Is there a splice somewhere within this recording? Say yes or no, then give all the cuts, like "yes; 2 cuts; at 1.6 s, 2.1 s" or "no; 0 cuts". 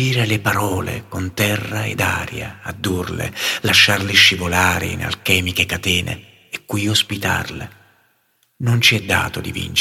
no; 0 cuts